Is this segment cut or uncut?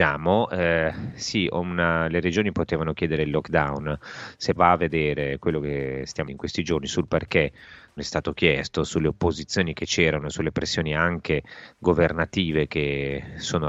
cut